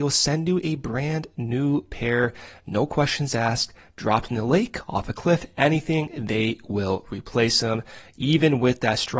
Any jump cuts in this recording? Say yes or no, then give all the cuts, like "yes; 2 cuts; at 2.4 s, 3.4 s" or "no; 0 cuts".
no; 0 cuts